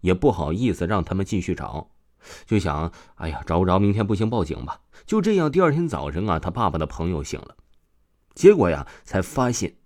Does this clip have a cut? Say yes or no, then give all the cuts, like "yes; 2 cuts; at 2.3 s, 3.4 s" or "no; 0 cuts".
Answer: no; 0 cuts